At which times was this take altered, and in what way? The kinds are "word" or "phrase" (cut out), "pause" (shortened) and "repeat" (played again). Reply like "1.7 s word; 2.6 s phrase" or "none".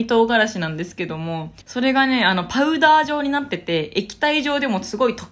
1.6 s pause

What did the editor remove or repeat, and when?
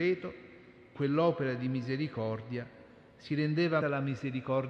0.9 s word; 3.8 s word

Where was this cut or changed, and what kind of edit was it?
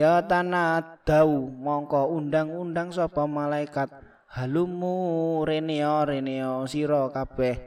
none

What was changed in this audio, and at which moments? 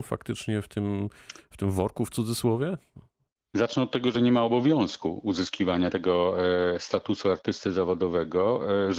none

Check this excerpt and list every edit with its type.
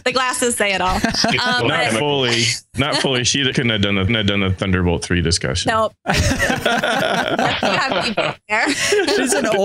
1.6 s word; 3.5 s word; 4.1 s repeat

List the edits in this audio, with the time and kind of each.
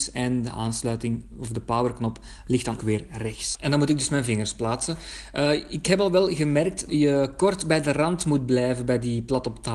2.8 s word; 6.9 s word

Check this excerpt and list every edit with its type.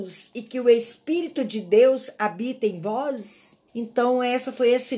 3.7 s pause

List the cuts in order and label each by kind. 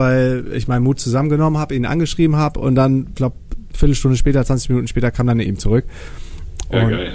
3.2 s word; 5.5 s phrase

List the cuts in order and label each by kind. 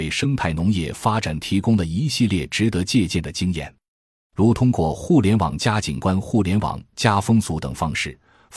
none

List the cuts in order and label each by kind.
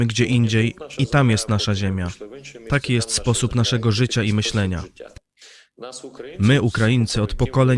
none

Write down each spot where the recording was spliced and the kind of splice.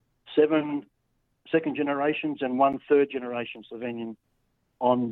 none

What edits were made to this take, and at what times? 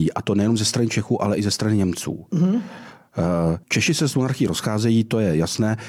3.6 s pause

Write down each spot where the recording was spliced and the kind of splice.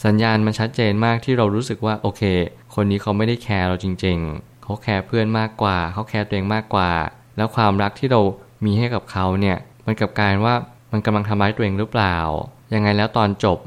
none

